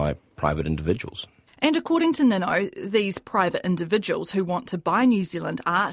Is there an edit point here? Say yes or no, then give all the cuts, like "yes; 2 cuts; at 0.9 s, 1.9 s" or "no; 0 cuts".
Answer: no; 0 cuts